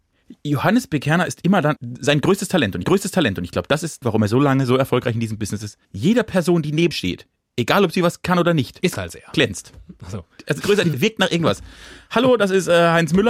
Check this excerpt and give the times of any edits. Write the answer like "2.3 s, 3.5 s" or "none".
1.8 s, 2.8 s, 4.0 s, 5.8 s, 6.9 s, 8.9 s, 10.6 s, 10.9 s